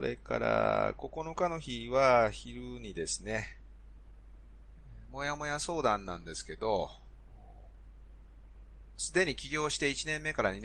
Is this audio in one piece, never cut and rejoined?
yes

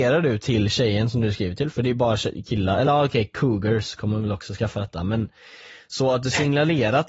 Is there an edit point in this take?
no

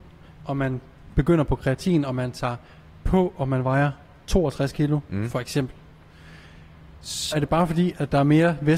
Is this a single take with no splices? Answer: no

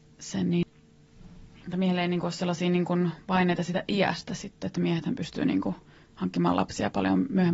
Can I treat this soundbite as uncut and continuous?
yes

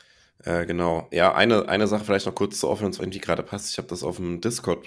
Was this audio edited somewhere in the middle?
yes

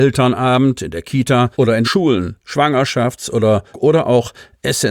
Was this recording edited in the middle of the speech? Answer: yes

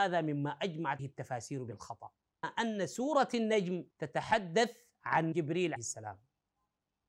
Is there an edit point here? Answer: yes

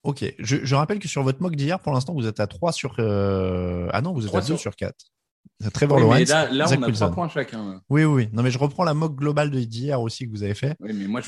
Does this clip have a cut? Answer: no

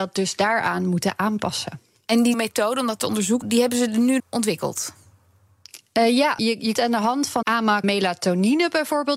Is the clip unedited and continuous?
no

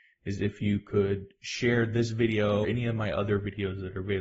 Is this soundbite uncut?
no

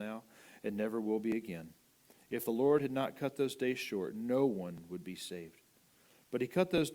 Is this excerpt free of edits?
yes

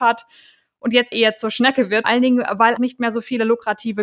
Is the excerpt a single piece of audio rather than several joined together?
no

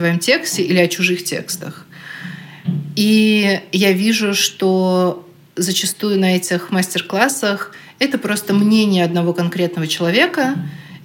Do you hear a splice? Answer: no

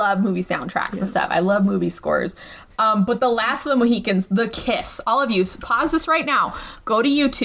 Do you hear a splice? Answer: no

